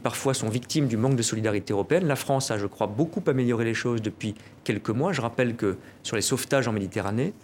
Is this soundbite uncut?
yes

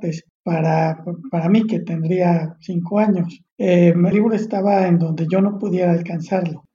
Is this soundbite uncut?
no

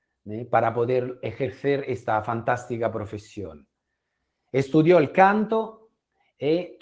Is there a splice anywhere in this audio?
no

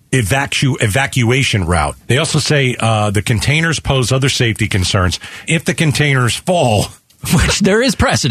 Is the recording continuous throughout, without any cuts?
no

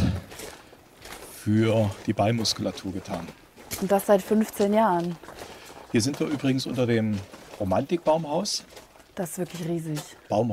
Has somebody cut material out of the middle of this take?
no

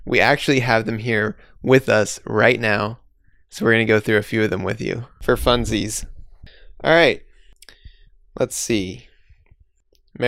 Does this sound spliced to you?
no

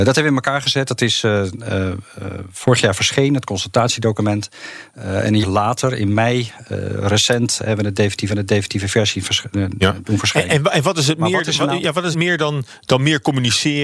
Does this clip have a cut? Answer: yes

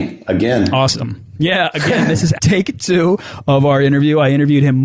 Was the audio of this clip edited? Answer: yes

